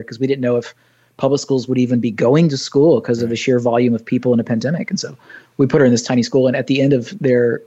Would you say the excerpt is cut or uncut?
uncut